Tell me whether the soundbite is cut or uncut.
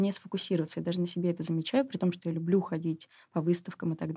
uncut